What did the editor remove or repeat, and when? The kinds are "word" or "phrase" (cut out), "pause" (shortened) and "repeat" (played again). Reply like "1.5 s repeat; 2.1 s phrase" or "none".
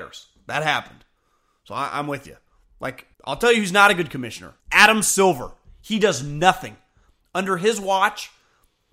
3.1 s pause; 4.6 s pause